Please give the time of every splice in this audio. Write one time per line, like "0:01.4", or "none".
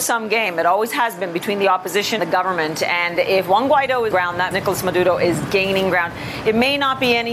0:02.2
0:04.1
0:04.5